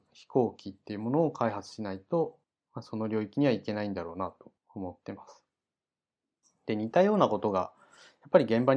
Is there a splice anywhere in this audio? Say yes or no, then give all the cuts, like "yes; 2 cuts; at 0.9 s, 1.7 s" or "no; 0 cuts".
yes; 2 cuts; at 2.4 s, 4.6 s